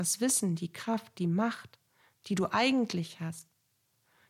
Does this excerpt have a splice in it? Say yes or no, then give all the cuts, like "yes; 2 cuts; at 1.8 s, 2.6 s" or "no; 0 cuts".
no; 0 cuts